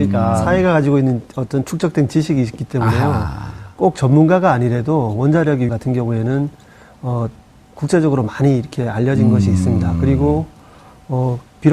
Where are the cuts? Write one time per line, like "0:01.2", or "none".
0:05.7